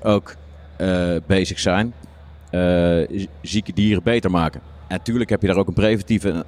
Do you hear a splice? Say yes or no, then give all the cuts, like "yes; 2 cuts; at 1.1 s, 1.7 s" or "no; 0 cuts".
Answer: no; 0 cuts